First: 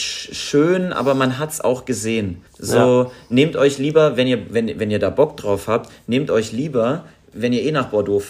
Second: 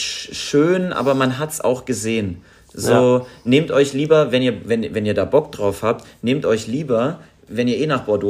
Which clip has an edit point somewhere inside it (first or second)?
first